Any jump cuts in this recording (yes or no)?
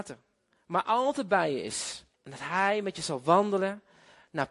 yes